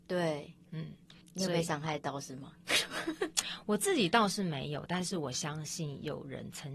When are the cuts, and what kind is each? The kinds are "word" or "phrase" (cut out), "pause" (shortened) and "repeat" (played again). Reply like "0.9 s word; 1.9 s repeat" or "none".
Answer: 1.2 s pause